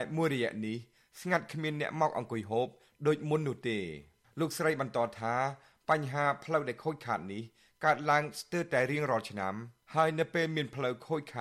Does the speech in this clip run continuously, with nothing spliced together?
yes; 0 cuts

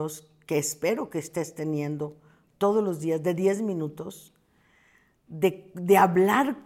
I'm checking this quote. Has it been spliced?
no; 0 cuts

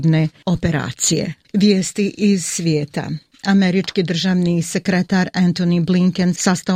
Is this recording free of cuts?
yes; 0 cuts

